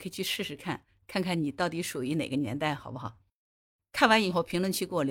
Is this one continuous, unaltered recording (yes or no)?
yes